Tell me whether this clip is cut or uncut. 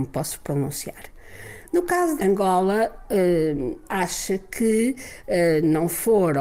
cut